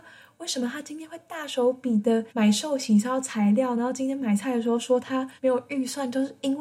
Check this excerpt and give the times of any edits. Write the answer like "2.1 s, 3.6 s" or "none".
2.3 s, 5.4 s

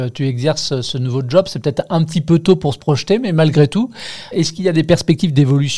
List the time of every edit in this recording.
4.3 s

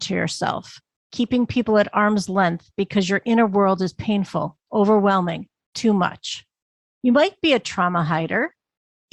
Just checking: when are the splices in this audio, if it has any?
none

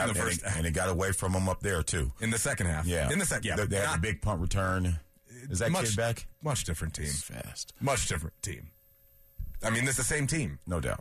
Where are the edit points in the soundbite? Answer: 3.4 s, 7.2 s, 10.0 s

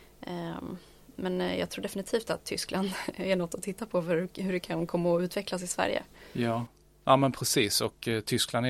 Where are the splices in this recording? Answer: none

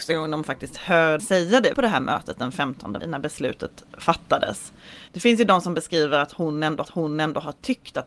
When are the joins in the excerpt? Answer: 1.2 s, 1.7 s, 3.0 s, 5.1 s, 6.8 s

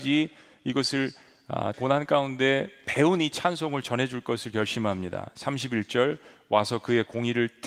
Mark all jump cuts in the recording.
1.7 s

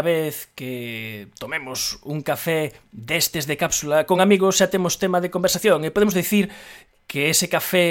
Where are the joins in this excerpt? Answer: none

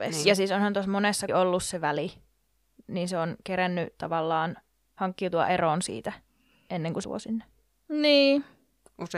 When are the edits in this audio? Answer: 1.3 s, 7.0 s

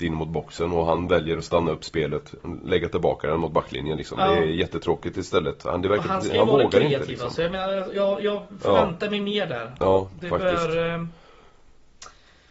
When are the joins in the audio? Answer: none

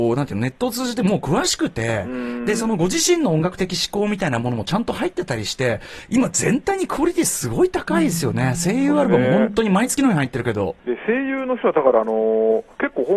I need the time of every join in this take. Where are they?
10.8 s

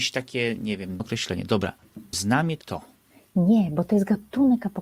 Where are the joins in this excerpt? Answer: 1.0 s, 2.1 s, 2.6 s

